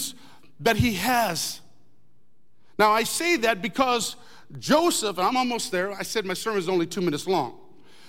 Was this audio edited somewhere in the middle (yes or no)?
no